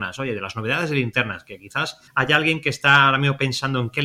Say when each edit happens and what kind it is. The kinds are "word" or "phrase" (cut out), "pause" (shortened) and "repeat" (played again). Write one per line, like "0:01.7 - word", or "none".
0:02.1 - pause